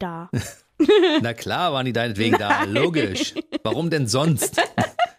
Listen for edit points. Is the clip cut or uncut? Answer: uncut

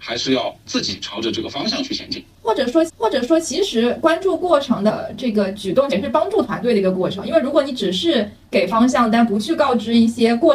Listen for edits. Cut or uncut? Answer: cut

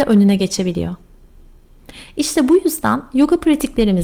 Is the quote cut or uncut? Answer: uncut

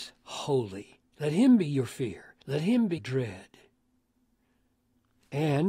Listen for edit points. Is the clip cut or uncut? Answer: cut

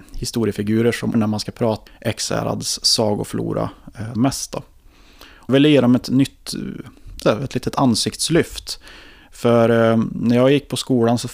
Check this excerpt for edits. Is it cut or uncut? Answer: cut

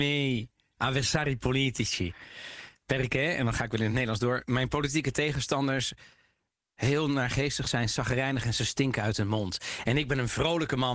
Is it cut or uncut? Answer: uncut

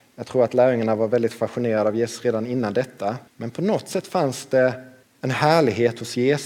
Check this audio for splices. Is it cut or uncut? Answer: cut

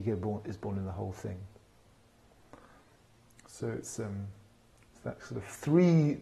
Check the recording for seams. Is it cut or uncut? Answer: uncut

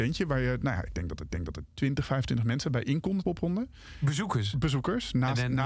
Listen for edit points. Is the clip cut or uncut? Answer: cut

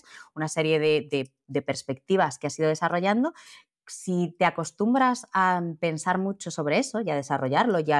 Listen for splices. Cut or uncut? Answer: uncut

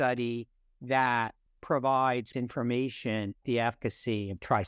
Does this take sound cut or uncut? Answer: cut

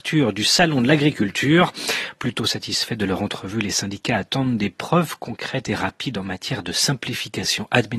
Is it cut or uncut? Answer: uncut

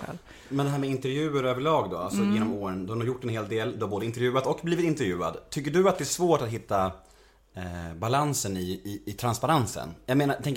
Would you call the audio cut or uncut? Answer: uncut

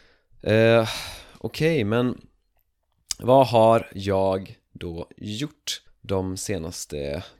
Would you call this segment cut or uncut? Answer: cut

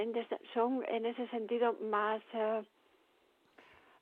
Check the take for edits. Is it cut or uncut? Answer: uncut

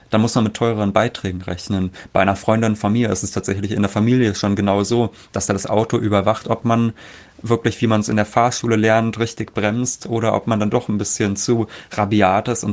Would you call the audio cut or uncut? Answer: uncut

